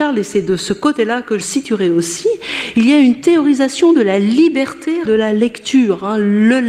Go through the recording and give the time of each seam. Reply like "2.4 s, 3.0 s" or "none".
1.4 s, 5.0 s